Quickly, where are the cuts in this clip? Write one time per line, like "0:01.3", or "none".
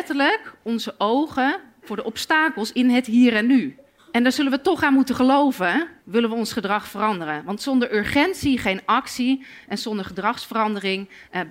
0:04.0
0:06.0